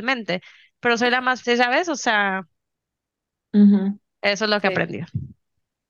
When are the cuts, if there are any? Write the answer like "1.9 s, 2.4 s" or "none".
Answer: 1.4 s